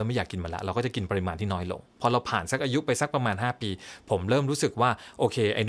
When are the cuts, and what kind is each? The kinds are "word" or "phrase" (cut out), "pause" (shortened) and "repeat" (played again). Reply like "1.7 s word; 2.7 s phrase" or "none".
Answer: 1.9 s pause